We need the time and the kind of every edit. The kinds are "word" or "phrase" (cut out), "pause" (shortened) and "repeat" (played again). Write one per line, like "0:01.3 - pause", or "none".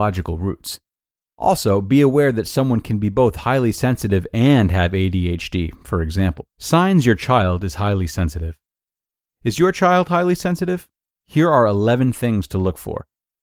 0:06.5 - pause